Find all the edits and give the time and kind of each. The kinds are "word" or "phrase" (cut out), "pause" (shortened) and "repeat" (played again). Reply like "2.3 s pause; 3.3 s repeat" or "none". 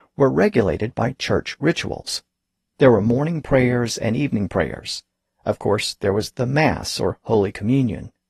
2.6 s pause